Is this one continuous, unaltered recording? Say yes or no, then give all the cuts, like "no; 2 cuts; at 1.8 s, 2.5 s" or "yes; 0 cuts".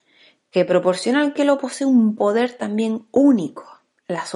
yes; 0 cuts